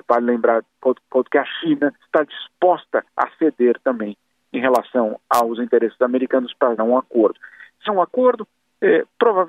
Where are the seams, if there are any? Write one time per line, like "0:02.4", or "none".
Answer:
0:01.0
0:02.0
0:03.1
0:06.8
0:07.9